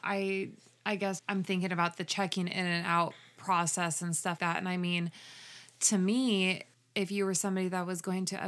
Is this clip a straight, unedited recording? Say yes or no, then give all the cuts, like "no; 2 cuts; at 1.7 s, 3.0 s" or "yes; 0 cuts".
no; 3 cuts; at 1.2 s, 4.4 s, 6.7 s